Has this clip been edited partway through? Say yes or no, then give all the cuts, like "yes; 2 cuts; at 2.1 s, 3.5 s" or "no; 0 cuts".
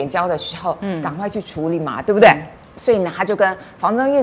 yes; 1 cut; at 2.6 s